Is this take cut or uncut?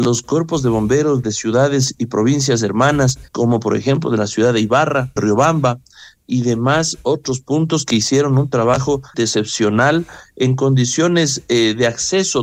cut